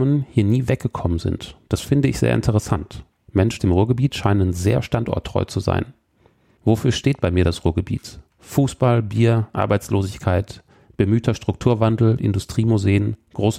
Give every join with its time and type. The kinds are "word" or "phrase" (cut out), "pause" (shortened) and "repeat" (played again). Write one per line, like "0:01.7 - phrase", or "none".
0:03.6 - word
0:08.3 - pause

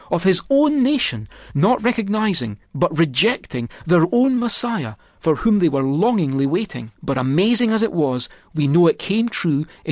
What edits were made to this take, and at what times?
0:02.7 - pause
0:06.9 - pause

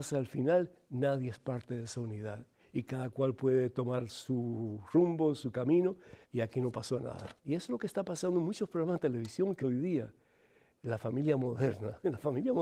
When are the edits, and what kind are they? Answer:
0:02.6 - pause
0:06.2 - pause
0:07.4 - pause
0:09.6 - word

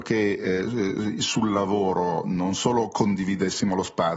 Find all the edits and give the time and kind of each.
none

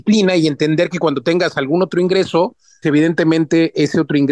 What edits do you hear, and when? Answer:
0:02.8 - word

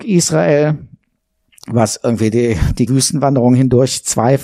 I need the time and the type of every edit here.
0:02.9 - word

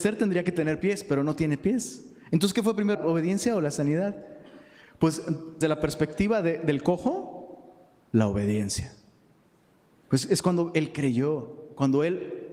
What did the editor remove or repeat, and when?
0:02.9 - word
0:05.6 - word

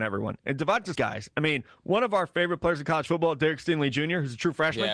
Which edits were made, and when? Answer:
0:00.9 - phrase

